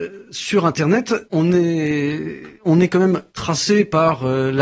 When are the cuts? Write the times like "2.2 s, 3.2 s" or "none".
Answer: 1.3 s, 2.5 s, 3.3 s